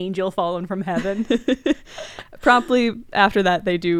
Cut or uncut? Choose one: uncut